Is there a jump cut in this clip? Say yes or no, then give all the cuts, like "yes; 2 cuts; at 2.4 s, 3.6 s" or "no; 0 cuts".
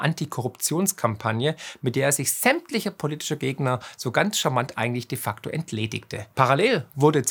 no; 0 cuts